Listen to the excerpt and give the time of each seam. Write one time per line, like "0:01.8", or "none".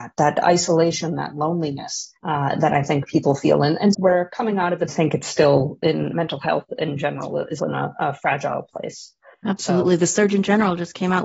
0:02.2
0:03.9
0:04.9
0:06.1
0:07.6